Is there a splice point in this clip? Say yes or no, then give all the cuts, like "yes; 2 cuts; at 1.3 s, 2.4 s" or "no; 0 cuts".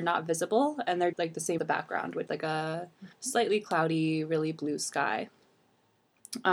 yes; 4 cuts; at 1.1 s, 1.6 s, 2.3 s, 3.1 s